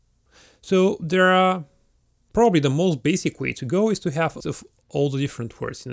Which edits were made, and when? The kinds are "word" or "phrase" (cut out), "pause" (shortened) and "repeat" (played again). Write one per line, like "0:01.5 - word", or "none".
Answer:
0:04.4 - word